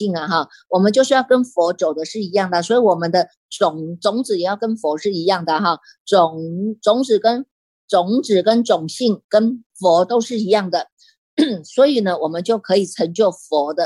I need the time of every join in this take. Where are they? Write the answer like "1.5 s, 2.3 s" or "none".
none